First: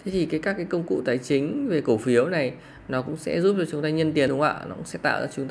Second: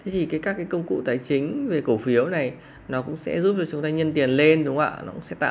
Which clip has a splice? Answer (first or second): first